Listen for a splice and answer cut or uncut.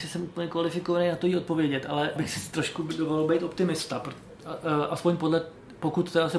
cut